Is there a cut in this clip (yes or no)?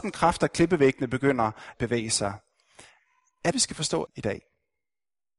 yes